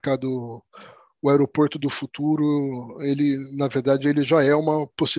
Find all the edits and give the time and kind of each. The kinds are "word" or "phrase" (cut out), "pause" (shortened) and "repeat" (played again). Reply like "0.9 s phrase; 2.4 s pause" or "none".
none